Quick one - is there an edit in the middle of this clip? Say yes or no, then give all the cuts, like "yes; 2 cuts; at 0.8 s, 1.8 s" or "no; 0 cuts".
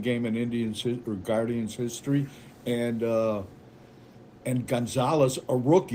no; 0 cuts